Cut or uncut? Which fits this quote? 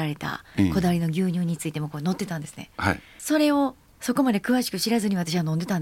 uncut